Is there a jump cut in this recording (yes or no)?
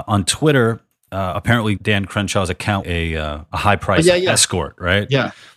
yes